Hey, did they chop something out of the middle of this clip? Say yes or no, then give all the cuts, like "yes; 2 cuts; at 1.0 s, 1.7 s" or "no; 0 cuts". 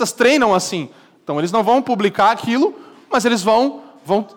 no; 0 cuts